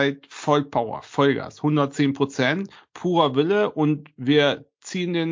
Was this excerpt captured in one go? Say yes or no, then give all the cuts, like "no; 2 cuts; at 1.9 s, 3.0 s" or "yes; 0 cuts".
yes; 0 cuts